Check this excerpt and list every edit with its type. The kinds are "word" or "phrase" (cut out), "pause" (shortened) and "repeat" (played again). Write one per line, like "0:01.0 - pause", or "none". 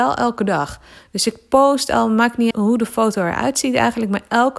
0:02.5 - word